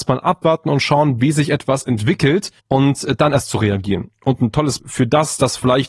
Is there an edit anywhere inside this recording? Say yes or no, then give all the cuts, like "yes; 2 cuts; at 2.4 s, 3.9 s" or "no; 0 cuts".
yes; 2 cuts; at 2.6 s, 4.8 s